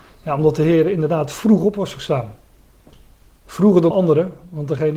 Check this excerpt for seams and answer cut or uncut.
cut